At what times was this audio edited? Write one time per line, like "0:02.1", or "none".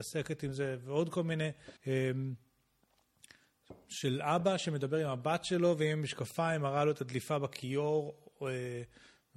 0:01.8